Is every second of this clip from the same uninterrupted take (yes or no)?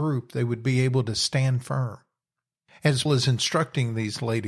no